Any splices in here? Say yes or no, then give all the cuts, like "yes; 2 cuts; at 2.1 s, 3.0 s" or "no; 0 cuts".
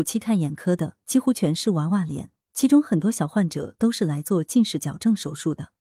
no; 0 cuts